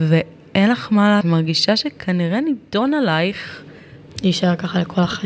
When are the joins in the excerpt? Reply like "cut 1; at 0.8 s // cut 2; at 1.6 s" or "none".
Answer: cut 1; at 1.2 s